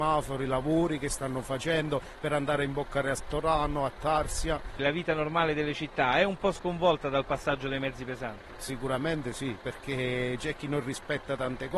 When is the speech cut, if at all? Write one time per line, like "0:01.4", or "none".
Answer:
none